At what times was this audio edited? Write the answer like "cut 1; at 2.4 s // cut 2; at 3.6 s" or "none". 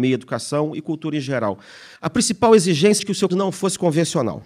cut 1; at 2.0 s // cut 2; at 3.0 s // cut 3; at 3.3 s